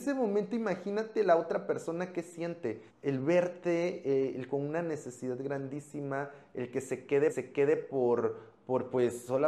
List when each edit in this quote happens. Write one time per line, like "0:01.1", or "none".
0:02.9
0:07.3